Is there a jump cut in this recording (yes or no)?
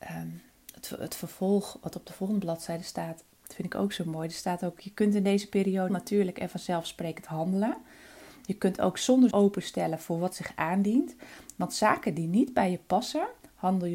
yes